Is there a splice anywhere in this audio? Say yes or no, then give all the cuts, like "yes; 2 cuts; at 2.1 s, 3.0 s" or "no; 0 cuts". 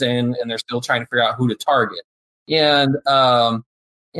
no; 0 cuts